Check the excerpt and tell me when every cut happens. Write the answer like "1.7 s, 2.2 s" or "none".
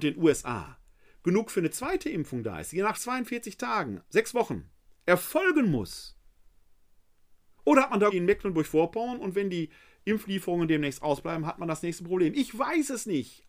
2.9 s, 4.0 s, 8.1 s